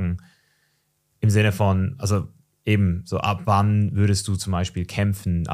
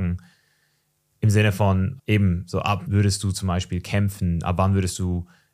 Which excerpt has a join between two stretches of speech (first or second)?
second